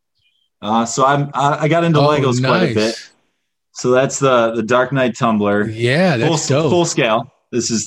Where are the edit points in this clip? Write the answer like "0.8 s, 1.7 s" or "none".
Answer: none